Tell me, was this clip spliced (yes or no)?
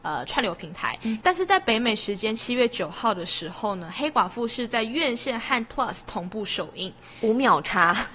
yes